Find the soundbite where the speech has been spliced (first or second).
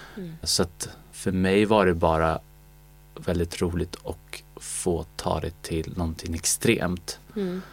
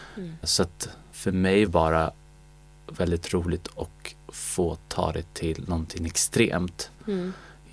second